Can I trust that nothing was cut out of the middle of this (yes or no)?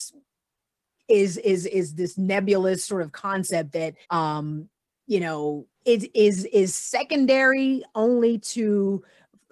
no